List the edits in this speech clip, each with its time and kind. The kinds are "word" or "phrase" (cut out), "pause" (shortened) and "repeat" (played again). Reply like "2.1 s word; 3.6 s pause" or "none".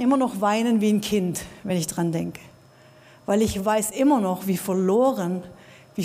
none